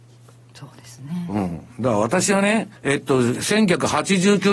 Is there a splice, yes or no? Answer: yes